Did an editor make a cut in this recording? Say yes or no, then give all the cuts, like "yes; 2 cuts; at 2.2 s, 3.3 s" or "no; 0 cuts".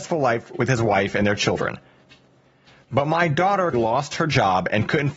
yes; 1 cut; at 3.7 s